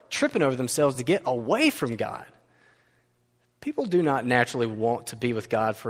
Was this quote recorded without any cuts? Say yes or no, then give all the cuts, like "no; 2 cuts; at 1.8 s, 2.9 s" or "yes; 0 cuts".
yes; 0 cuts